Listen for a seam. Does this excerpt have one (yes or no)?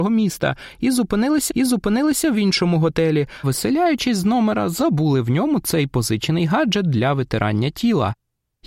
yes